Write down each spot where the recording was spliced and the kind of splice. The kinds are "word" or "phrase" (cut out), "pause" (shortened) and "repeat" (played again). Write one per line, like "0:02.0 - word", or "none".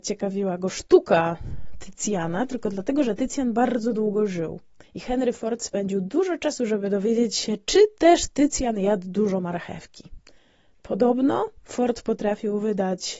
0:04.8 - pause
0:10.4 - pause